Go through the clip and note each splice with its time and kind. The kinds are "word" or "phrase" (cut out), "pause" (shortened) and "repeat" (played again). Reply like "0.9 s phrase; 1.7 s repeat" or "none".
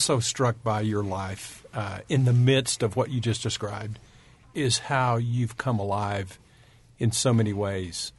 none

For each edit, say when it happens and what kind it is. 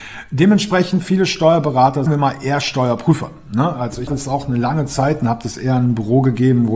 2.1 s phrase; 4.1 s word

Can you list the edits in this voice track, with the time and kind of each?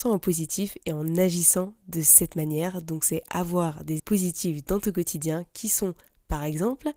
4.0 s word

